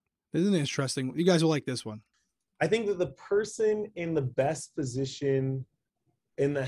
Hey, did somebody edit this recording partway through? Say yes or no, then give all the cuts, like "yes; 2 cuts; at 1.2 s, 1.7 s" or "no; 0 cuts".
no; 0 cuts